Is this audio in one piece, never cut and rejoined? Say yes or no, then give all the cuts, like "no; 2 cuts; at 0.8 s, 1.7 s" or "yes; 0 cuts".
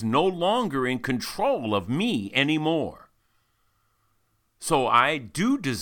yes; 0 cuts